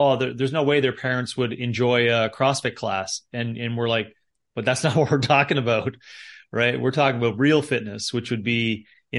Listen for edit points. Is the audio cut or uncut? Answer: uncut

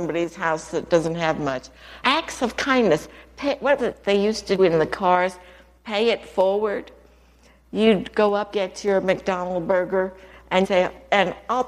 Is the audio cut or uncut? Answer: cut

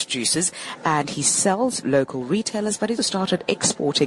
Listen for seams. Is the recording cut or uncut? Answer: cut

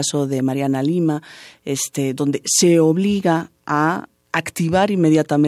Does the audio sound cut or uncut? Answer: uncut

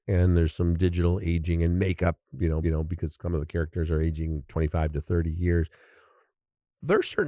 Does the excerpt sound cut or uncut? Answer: cut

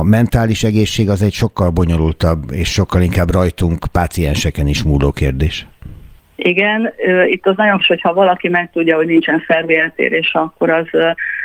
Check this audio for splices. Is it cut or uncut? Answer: cut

